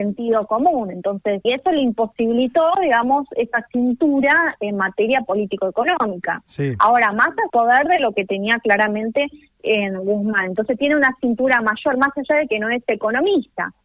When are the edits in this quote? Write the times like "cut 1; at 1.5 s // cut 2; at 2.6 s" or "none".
cut 1; at 1.4 s // cut 2; at 7.5 s